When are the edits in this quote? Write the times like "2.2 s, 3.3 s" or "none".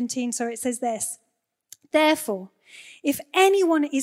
none

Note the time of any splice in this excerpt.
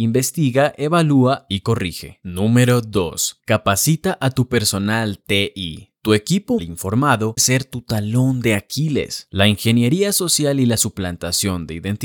6.6 s, 7.4 s

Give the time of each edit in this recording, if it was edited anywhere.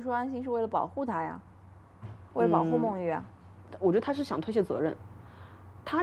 none

